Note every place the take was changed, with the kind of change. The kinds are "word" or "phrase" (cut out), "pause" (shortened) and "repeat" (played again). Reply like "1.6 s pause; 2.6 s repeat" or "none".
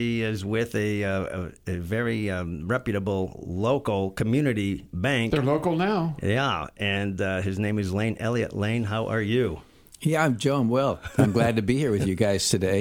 none